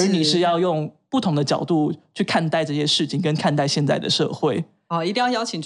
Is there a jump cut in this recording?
no; 0 cuts

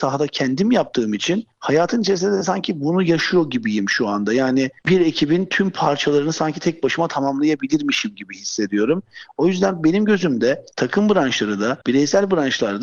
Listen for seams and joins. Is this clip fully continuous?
no; 4 cuts; at 1.5 s, 4.8 s, 10.7 s, 11.8 s

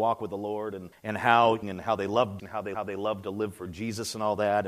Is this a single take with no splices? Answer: no; 4 cuts; at 0.9 s, 1.6 s, 2.4 s, 2.7 s

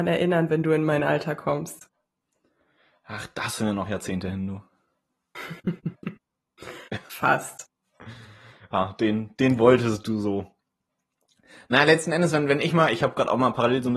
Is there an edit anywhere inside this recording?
no; 0 cuts

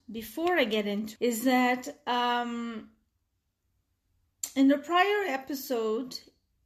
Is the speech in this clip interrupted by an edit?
yes; 1 cut; at 1.2 s

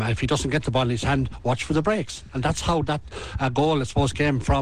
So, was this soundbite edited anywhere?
no; 0 cuts

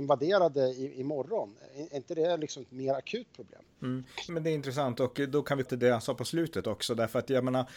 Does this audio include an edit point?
yes; 2 cuts; at 4.3 s, 5.7 s

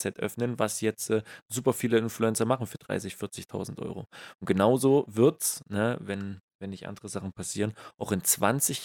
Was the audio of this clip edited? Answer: no; 0 cuts

